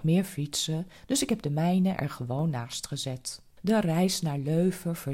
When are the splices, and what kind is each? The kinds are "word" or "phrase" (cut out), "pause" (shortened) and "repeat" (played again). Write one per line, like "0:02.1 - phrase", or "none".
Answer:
0:03.5 - pause